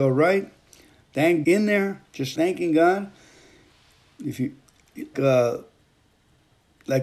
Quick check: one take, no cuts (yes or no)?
no